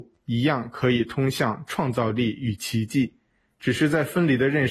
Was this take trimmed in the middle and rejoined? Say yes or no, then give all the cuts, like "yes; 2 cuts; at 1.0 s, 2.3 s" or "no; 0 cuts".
no; 0 cuts